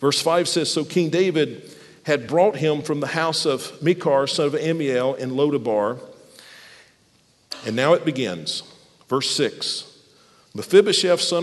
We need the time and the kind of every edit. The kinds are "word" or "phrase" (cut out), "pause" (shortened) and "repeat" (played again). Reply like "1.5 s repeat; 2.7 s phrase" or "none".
none